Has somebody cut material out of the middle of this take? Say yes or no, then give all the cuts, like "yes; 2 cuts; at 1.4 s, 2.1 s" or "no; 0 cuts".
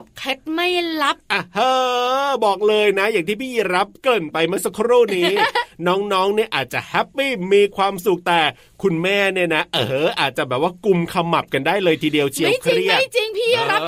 no; 0 cuts